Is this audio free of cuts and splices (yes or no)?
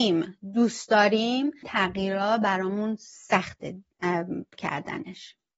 no